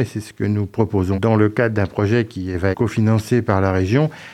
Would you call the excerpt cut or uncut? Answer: cut